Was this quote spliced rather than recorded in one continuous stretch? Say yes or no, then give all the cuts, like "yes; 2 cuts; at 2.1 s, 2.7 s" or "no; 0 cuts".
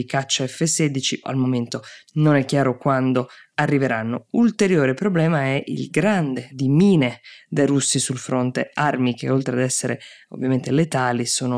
yes; 3 cuts; at 1.2 s, 6.5 s, 7.4 s